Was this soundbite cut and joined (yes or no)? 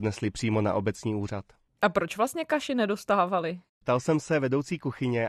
no